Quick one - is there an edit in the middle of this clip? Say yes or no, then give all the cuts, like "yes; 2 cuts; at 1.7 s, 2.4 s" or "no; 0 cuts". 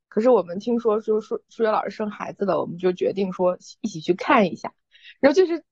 no; 0 cuts